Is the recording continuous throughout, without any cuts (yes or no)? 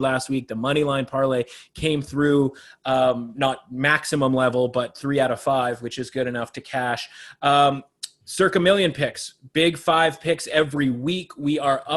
yes